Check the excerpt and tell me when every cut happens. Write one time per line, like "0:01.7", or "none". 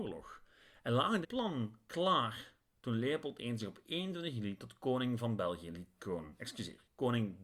0:01.2
0:06.0